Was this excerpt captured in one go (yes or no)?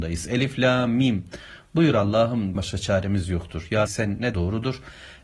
no